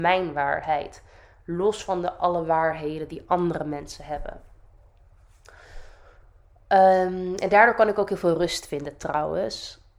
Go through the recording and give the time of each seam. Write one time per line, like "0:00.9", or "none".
none